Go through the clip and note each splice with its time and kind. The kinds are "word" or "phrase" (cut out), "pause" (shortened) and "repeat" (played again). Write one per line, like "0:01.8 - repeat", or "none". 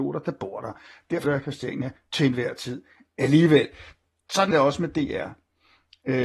0:01.2 - word
0:04.5 - word